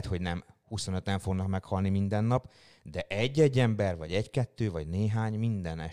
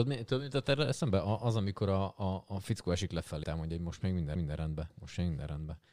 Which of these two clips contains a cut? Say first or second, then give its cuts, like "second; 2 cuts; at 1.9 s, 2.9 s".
second; 2 cuts; at 3.4 s, 4.4 s